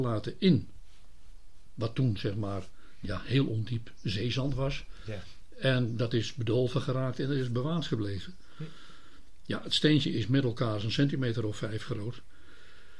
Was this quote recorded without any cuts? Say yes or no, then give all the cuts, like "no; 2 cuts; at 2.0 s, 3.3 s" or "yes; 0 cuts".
yes; 0 cuts